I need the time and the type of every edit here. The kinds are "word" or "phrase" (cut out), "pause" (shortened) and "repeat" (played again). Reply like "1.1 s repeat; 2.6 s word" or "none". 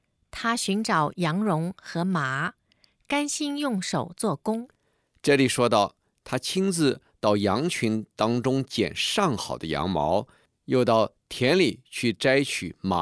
none

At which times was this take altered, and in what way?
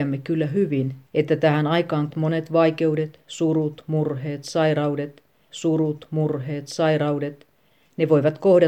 1.1 s pause; 2.1 s word; 5.5 s repeat

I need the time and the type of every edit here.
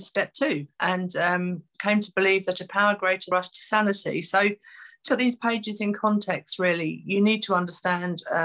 3.3 s phrase; 5.1 s word

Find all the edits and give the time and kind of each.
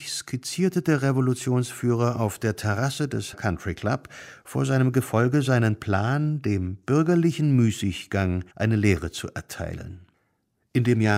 3.3 s word; 8.5 s pause

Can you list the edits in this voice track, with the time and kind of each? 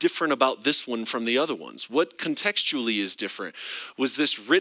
none

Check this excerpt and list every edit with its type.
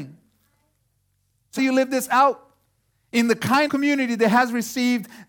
1.6 s word; 2.9 s pause; 3.7 s word

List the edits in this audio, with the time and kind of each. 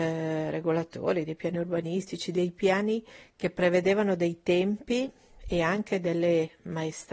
none

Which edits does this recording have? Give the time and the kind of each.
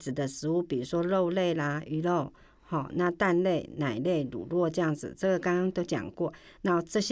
none

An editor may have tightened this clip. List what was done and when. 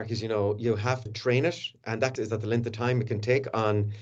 1.1 s word; 2.2 s phrase

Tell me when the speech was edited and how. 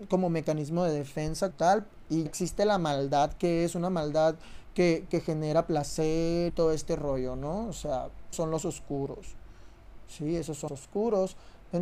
1.5 s word; 2.3 s word; 5.1 s word; 6.5 s word; 8.3 s word; 10.7 s word

